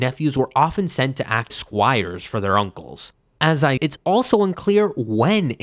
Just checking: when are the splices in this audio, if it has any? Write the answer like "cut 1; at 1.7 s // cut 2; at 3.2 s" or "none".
cut 1; at 1.5 s // cut 2; at 3.2 s // cut 3; at 3.8 s